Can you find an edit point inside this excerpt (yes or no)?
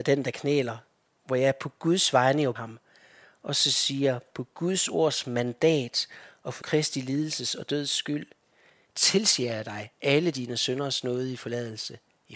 yes